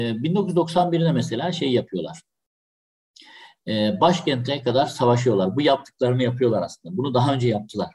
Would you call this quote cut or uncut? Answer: uncut